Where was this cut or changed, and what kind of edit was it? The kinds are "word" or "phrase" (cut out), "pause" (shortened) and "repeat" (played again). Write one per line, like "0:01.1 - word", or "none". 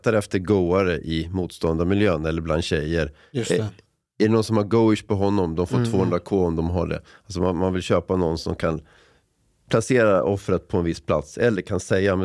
none